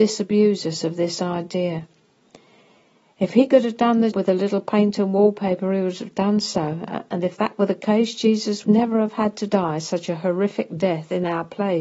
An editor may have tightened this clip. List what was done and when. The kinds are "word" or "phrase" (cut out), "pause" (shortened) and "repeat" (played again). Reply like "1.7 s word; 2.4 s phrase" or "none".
4.1 s word; 8.6 s word